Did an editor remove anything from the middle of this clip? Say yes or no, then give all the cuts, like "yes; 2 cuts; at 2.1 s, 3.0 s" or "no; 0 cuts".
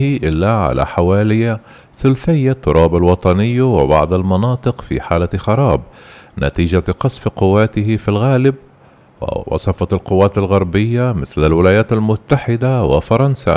no; 0 cuts